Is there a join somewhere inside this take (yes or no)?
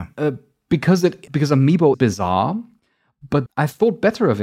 yes